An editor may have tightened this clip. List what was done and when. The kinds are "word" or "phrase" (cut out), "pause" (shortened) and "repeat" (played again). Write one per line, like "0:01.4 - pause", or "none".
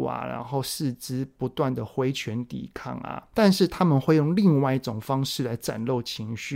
none